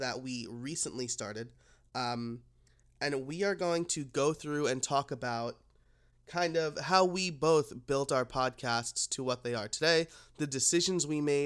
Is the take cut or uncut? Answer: uncut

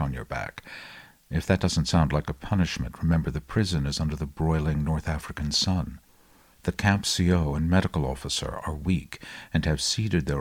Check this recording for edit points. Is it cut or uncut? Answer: uncut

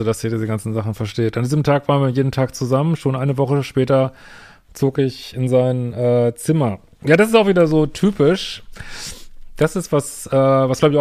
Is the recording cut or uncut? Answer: uncut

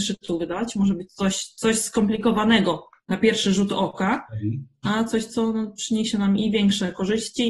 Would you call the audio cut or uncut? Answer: uncut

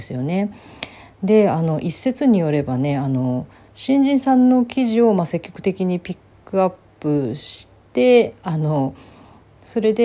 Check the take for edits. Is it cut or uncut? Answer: uncut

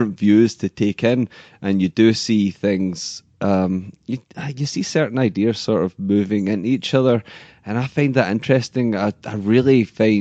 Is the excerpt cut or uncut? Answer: uncut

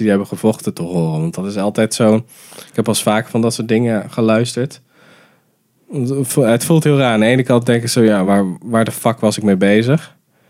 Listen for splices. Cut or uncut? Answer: uncut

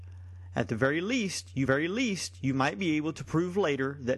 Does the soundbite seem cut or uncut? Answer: cut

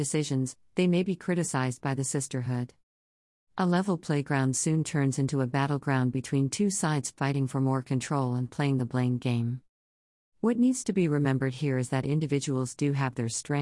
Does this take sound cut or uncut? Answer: uncut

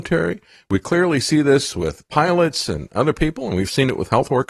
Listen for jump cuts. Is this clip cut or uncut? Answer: uncut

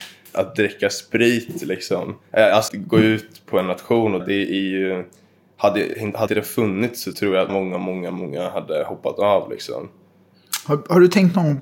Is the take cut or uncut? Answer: cut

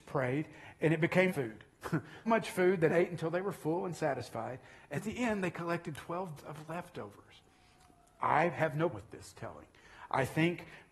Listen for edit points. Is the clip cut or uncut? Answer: cut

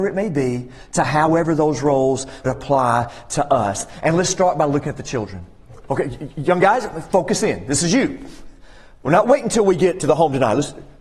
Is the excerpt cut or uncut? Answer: cut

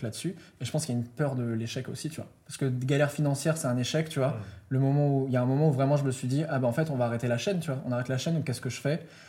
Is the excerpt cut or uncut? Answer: uncut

